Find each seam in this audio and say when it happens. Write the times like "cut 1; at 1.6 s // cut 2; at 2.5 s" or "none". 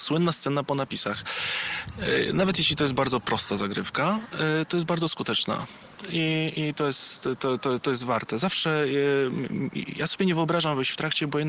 none